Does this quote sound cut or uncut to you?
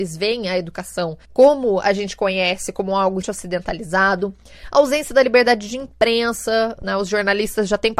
cut